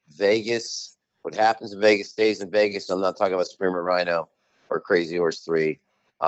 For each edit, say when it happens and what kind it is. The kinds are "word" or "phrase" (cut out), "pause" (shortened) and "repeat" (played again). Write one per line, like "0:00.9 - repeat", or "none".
none